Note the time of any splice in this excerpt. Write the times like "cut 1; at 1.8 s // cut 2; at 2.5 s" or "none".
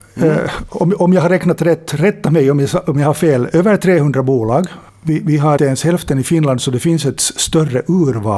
cut 1; at 4.9 s // cut 2; at 5.6 s